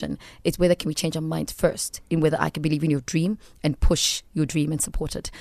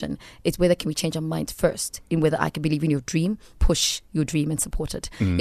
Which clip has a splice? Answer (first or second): second